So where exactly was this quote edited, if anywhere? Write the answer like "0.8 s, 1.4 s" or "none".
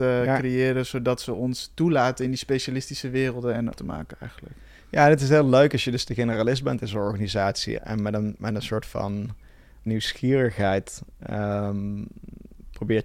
3.7 s, 7.8 s, 9.9 s